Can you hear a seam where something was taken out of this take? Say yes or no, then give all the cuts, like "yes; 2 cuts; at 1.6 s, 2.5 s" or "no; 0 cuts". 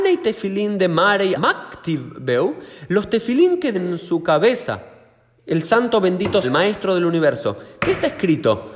yes; 4 cuts; at 1.4 s, 3.7 s, 5.4 s, 6.4 s